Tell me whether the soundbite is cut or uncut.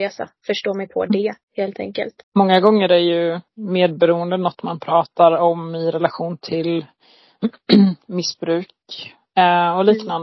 cut